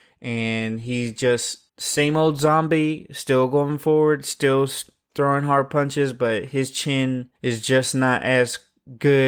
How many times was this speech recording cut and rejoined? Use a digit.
2